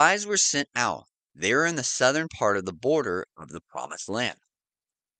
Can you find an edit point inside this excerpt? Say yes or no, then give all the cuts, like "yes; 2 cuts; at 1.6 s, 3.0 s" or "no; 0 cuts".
no; 0 cuts